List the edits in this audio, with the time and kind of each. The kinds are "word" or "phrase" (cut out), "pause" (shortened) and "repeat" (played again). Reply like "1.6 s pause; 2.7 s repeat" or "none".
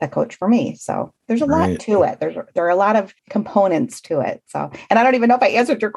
1.2 s pause; 3.2 s pause